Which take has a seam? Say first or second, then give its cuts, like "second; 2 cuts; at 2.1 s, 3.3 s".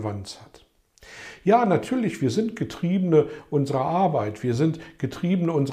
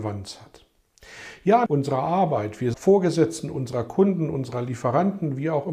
second; 2 cuts; at 1.7 s, 2.7 s